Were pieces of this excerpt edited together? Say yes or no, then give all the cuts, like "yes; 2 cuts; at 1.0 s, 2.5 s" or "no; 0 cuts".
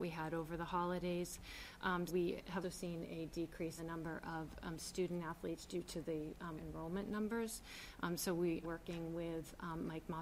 yes; 6 cuts; at 2.1 s, 2.6 s, 3.8 s, 5.7 s, 6.6 s, 8.6 s